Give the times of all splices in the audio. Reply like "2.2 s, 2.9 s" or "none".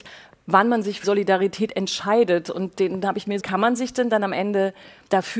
1.0 s, 3.4 s